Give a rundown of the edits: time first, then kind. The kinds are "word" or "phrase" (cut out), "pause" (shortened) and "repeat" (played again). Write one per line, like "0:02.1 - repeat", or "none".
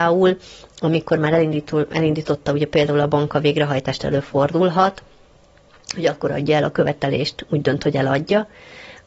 none